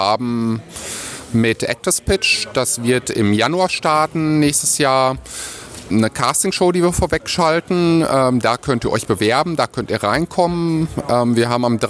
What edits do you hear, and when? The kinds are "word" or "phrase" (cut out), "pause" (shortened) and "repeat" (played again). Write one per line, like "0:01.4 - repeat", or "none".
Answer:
0:05.9 - word